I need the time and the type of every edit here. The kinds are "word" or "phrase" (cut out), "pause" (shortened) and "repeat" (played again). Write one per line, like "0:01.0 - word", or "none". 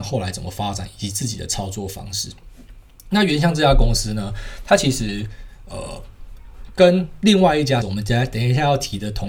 0:07.8 - word